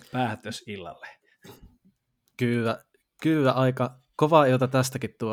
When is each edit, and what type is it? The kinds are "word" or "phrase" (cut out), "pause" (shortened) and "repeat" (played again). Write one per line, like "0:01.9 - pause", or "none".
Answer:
none